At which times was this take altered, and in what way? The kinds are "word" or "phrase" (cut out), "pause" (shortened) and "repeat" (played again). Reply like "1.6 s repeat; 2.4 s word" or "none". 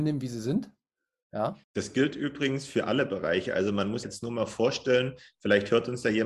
1.6 s pause; 4.0 s phrase